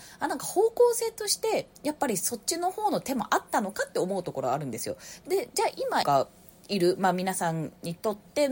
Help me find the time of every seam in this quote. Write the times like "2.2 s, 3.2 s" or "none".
6.0 s

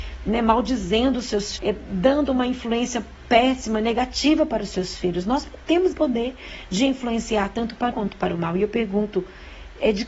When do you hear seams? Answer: 1.6 s, 5.9 s, 7.9 s

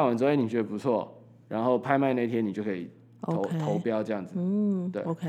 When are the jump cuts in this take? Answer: none

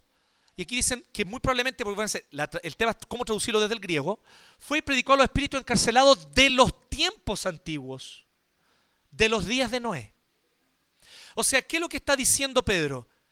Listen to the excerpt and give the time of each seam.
none

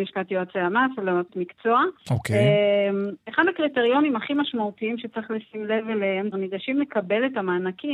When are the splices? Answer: 1.3 s, 6.3 s

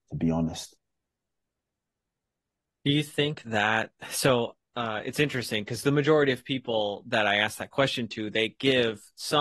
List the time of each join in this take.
3.4 s, 4.6 s

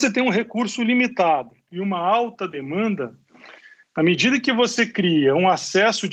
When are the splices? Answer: none

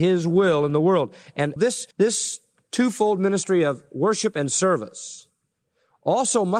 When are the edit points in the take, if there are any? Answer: 1.6 s, 1.9 s

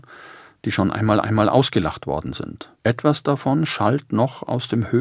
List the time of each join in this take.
1.2 s, 2.8 s

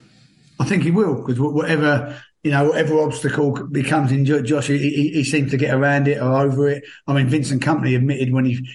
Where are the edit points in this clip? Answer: none

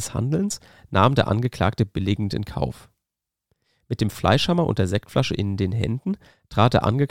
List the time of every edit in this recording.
none

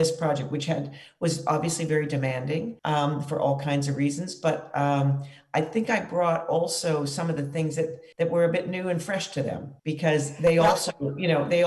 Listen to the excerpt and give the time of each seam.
2.8 s, 8.1 s, 9.8 s

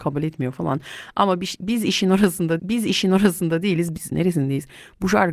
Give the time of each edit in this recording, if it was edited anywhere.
2.6 s, 4.1 s

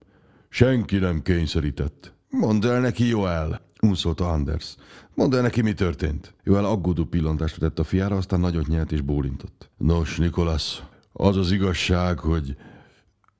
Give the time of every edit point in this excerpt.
6.4 s, 9.7 s, 10.9 s

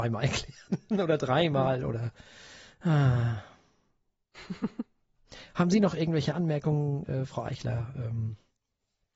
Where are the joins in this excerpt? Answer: none

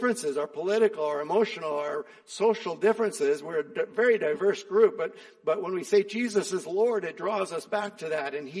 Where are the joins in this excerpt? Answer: none

